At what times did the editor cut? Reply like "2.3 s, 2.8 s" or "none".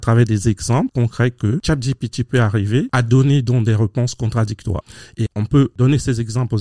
5.3 s